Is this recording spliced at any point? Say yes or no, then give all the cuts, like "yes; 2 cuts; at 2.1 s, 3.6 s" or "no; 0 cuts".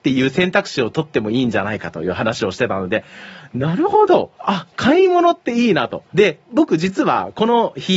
yes; 2 cuts; at 4.4 s, 6.1 s